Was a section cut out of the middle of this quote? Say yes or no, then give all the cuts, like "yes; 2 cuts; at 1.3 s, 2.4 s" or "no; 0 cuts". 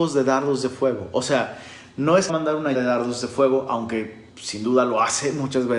yes; 3 cuts; at 2.3 s, 2.7 s, 4.3 s